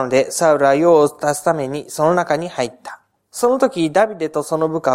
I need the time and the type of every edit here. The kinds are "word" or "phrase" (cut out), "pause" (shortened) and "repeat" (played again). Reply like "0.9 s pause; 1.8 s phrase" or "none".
3.2 s pause